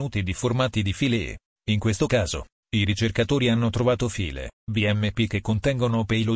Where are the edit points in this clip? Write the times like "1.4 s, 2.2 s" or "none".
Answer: 4.6 s